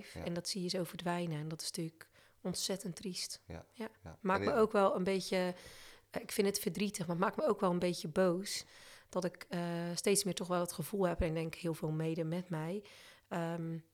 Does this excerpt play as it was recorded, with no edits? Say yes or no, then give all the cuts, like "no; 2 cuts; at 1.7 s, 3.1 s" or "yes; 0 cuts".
yes; 0 cuts